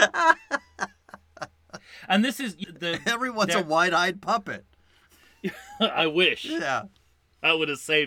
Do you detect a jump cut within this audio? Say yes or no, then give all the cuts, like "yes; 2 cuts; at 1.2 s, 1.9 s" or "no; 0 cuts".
yes; 1 cut; at 2.6 s